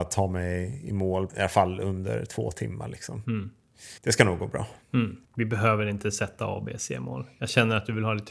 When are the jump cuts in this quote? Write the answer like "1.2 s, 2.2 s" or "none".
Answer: 1.3 s, 4.0 s, 5.2 s